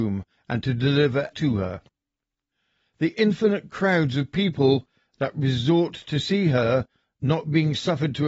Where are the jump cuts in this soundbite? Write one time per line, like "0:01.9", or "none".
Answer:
0:01.3